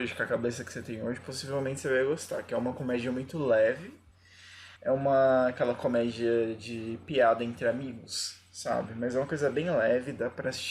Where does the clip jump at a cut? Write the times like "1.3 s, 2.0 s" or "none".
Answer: 4.8 s